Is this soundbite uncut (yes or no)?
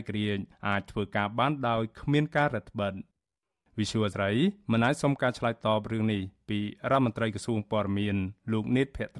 no